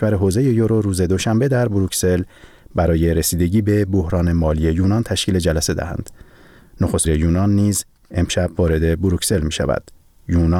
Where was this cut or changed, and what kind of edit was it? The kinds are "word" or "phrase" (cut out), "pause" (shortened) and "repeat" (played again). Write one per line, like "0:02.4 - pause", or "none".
0:07.0 - word